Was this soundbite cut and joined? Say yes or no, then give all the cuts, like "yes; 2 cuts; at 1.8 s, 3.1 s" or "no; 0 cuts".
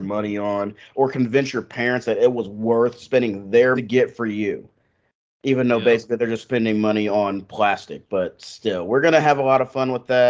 yes; 1 cut; at 3.8 s